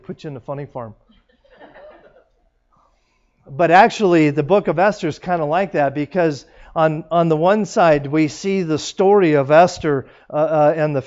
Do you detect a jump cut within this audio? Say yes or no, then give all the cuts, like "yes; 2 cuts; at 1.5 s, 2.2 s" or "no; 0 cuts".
no; 0 cuts